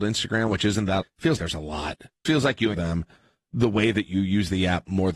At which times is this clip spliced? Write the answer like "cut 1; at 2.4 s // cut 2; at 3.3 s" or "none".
cut 1; at 1.0 s // cut 2; at 1.4 s // cut 3; at 2.3 s // cut 4; at 2.7 s